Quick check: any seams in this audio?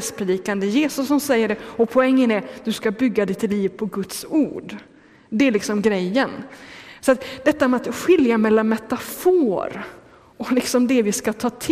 no; 0 cuts

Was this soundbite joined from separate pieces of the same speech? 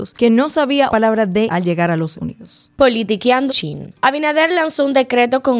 yes; 4 cuts; at 0.9 s, 1.5 s, 2.1 s, 3.5 s

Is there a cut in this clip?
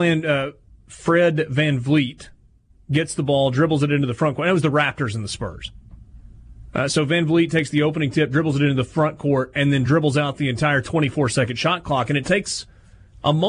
no; 0 cuts

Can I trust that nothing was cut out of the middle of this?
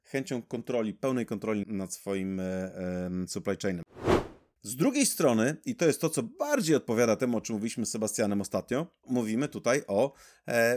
no; 2 cuts; at 1.6 s, 9.0 s

